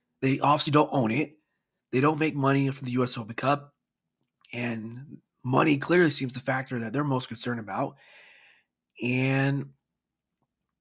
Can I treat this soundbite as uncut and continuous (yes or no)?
yes